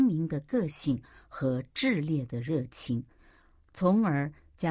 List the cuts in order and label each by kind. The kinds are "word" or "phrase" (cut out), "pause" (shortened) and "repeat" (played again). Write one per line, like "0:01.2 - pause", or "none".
none